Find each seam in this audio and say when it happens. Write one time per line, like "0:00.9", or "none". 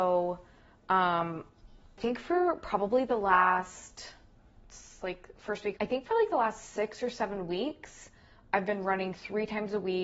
0:02.0
0:05.8